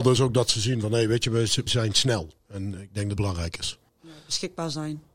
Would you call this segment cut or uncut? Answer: cut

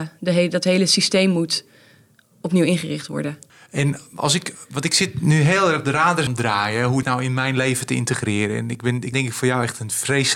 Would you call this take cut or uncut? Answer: cut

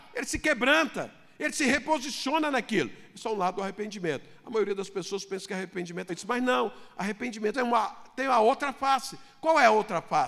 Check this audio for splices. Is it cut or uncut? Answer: cut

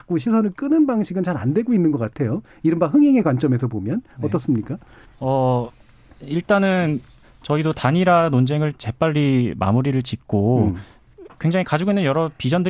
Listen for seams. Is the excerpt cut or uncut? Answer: cut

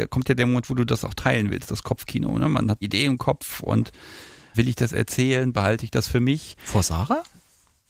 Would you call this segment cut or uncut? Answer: cut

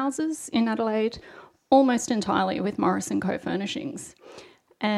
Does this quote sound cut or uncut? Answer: uncut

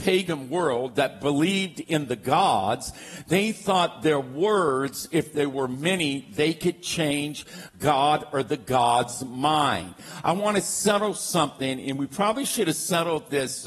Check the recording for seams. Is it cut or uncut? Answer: uncut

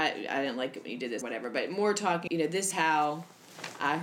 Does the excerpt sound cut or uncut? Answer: cut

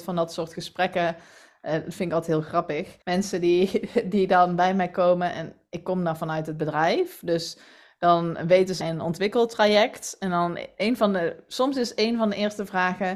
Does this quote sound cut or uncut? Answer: cut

